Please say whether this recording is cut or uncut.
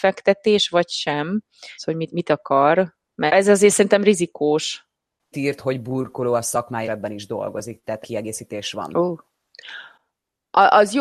cut